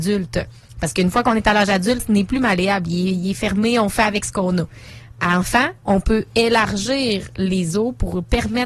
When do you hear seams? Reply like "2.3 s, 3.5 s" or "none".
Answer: 2.0 s